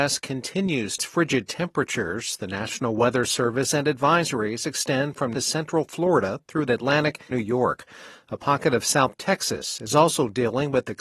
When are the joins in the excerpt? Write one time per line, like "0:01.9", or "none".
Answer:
0:01.0
0:03.6
0:05.3
0:06.7
0:07.3